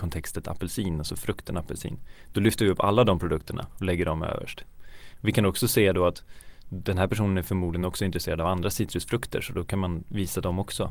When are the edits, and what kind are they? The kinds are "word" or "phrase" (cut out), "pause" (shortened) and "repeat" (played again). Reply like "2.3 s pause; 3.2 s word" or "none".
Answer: none

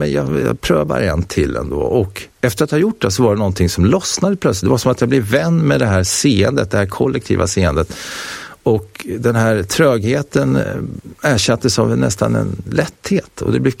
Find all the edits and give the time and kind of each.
none

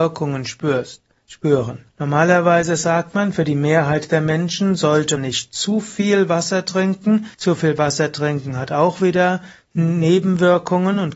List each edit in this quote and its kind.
1.9 s pause; 5.2 s word; 7.3 s pause

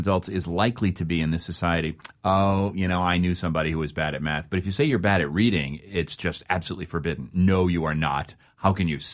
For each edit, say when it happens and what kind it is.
none

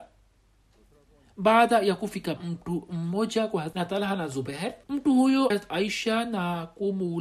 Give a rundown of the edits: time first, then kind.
2.4 s phrase; 3.7 s word; 4.8 s pause; 5.5 s word

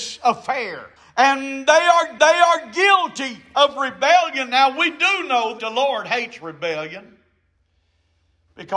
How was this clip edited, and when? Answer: 1.0 s pause; 2.2 s repeat; 5.6 s word

